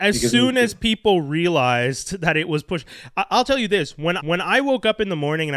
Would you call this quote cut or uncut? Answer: cut